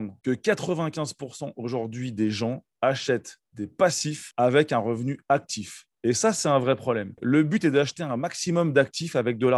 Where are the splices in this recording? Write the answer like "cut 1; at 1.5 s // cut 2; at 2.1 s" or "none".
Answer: none